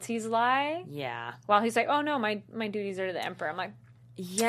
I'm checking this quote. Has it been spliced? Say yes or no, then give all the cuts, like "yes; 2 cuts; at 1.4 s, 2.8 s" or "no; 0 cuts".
no; 0 cuts